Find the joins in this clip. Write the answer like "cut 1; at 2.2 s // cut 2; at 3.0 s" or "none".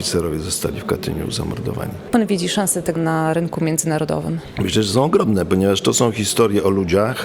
cut 1; at 2.1 s // cut 2; at 3.0 s